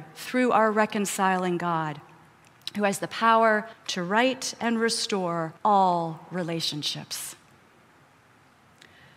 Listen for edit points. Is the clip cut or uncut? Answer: cut